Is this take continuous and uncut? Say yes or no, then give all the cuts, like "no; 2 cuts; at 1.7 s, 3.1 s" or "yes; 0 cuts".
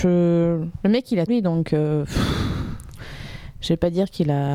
no; 1 cut; at 1.3 s